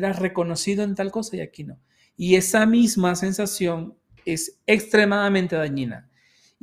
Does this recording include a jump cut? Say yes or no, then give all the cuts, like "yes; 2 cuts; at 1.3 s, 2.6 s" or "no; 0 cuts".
no; 0 cuts